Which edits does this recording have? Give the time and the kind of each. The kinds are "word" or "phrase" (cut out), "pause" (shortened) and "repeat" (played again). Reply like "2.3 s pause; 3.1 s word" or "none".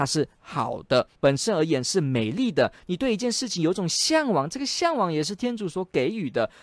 1.2 s pause